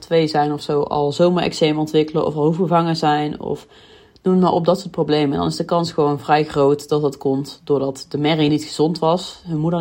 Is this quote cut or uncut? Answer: uncut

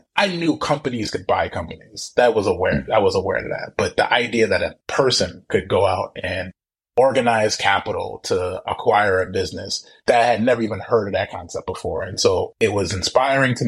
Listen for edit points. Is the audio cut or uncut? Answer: uncut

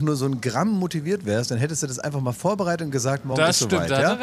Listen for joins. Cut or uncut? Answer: uncut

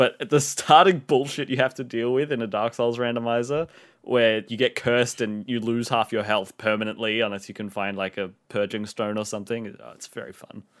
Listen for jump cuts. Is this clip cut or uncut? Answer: cut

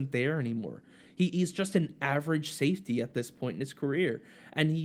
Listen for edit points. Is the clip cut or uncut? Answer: uncut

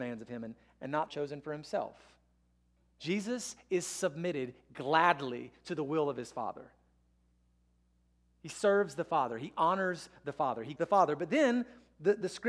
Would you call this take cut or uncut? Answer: cut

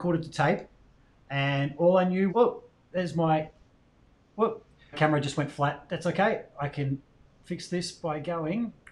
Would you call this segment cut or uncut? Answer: cut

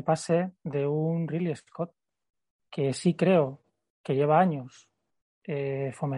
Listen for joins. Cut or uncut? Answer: uncut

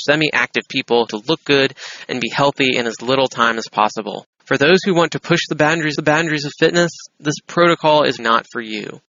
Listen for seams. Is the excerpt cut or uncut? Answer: cut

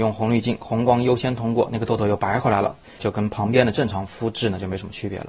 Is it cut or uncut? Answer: cut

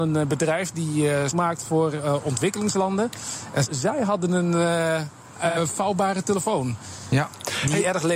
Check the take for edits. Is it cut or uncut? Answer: cut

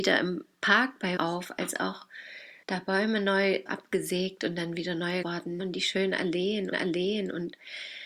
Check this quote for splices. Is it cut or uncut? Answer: cut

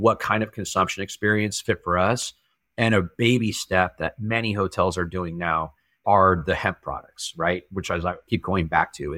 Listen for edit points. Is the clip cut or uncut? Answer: uncut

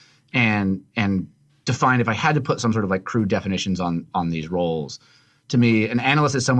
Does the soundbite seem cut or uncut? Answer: uncut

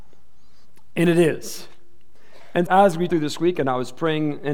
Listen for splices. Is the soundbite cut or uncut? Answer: cut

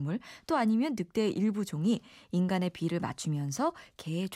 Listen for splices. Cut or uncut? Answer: uncut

